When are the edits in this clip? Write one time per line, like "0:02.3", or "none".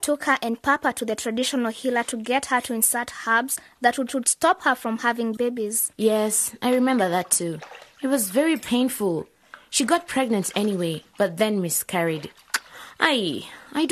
0:04.1